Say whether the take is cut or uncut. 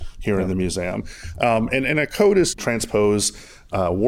cut